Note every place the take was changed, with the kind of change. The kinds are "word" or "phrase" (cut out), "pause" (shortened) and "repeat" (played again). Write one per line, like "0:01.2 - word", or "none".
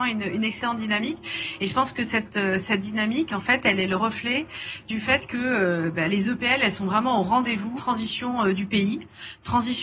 0:07.8 - phrase